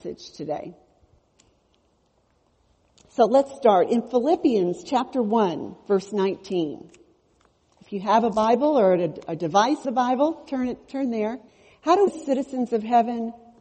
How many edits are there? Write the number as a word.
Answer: three